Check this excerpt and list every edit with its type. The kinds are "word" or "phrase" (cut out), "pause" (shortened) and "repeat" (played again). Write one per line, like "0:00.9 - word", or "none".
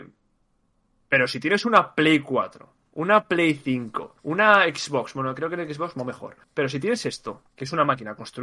0:04.2 - pause
0:06.4 - pause
0:07.5 - pause